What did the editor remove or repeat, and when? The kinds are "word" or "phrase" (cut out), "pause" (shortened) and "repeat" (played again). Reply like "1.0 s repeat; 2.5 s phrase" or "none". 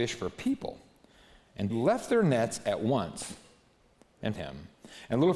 1.7 s word; 4.3 s word